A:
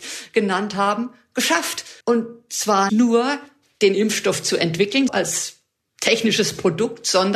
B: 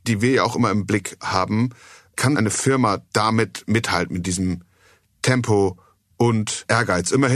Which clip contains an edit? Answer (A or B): A